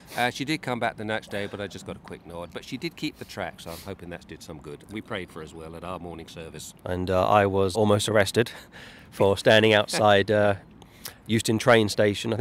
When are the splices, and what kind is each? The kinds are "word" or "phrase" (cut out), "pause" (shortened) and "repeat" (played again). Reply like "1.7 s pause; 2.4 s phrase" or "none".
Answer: 6.8 s pause; 7.7 s word